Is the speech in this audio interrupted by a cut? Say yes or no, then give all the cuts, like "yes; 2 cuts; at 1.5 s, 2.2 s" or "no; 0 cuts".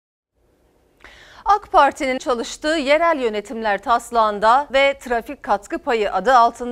yes; 2 cuts; at 2.2 s, 4.7 s